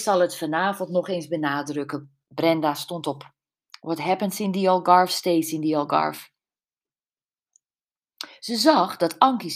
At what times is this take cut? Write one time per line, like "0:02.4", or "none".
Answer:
0:02.2
0:03.7

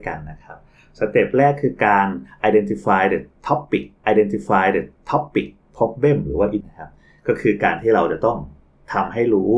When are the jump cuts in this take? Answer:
0:04.0
0:06.6

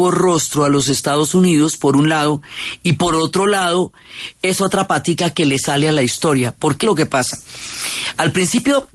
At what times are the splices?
0:06.8

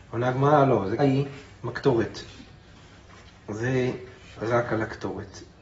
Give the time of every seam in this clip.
0:01.0
0:04.4

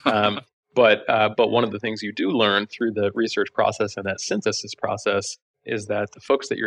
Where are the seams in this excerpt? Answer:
0:04.0

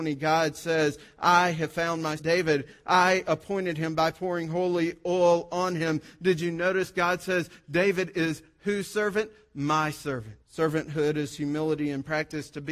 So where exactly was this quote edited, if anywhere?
0:02.2
0:10.4

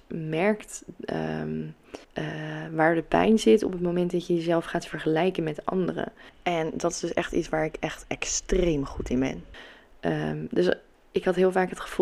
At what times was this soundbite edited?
0:02.0

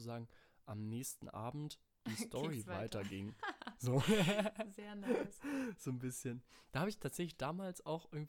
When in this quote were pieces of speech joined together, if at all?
none

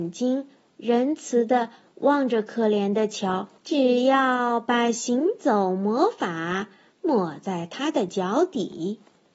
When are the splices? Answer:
0:03.6

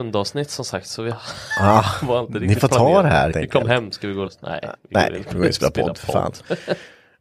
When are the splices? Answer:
0:03.3
0:04.3

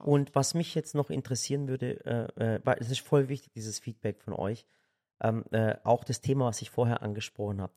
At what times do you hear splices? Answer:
none

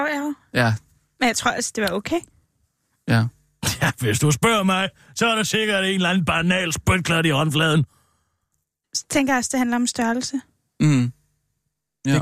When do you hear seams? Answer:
none

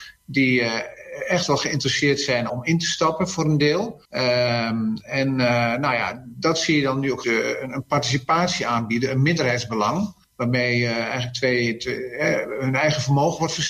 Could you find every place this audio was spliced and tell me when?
0:02.5
0:04.0
0:07.2
0:10.2

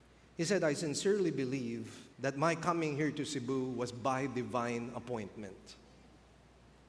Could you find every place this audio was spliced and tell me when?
0:02.1

